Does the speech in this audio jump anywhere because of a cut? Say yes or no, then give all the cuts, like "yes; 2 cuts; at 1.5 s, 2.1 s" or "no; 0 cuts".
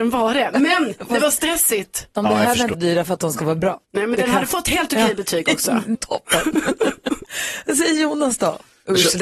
yes; 3 cuts; at 2.7 s, 3.8 s, 5.9 s